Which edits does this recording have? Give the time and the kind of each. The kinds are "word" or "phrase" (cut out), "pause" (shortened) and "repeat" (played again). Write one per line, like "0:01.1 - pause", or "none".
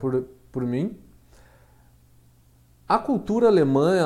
none